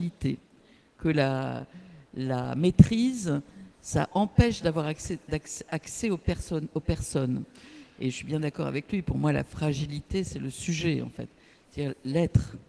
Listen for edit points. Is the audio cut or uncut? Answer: uncut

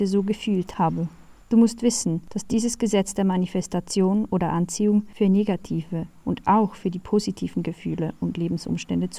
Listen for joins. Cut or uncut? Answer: cut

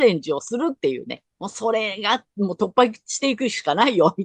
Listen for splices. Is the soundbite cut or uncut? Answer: cut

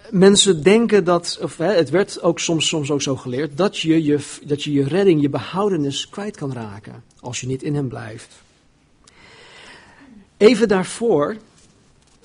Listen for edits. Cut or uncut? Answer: cut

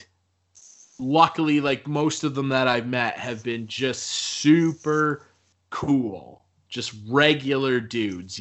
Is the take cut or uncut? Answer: uncut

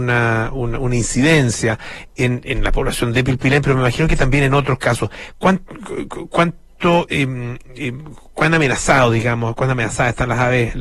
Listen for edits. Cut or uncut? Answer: uncut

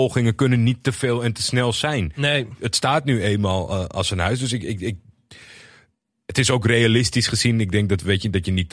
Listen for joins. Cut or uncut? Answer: uncut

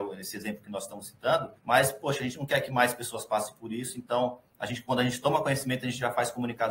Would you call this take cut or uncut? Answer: cut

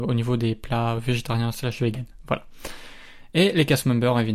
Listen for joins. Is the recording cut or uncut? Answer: uncut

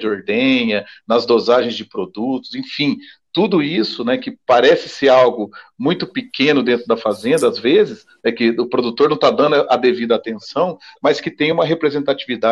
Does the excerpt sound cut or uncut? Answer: uncut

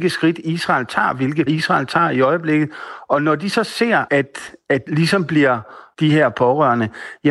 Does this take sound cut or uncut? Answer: cut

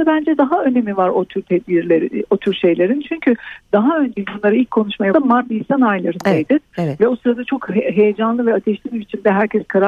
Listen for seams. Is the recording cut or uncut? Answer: cut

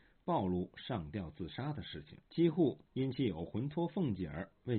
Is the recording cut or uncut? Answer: cut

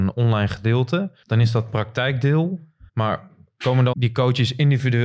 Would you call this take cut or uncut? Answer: cut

